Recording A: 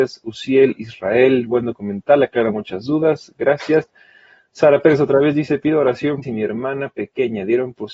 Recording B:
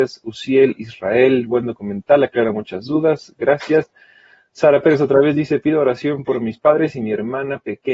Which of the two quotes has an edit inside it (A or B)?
A